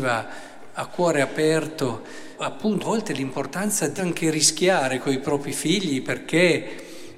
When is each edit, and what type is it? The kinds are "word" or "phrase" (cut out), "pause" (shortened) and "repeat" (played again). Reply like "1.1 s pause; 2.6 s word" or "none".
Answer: 2.4 s word; 2.8 s word; 4.0 s word